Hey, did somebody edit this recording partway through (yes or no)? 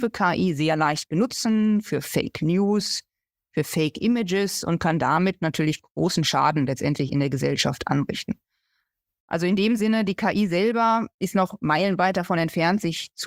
no